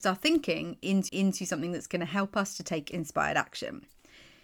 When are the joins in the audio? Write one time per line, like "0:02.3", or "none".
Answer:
0:01.1